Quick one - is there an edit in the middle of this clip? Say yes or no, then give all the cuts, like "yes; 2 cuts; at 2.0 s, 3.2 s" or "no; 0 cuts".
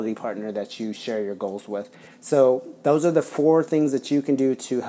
no; 0 cuts